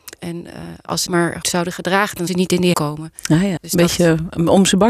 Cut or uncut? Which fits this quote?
cut